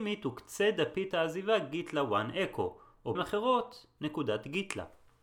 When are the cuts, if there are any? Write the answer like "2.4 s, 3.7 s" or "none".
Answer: 3.2 s